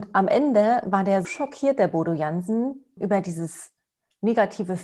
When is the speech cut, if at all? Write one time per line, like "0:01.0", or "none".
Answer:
0:01.2
0:03.0